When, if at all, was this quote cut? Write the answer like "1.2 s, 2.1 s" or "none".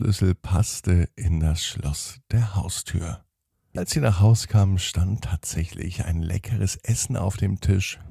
none